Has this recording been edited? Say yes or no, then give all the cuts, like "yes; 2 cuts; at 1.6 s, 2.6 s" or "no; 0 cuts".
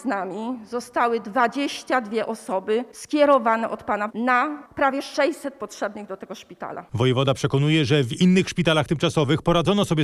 yes; 1 cut; at 4.1 s